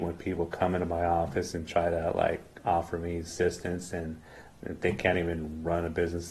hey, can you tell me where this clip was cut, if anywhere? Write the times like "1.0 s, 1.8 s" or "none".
none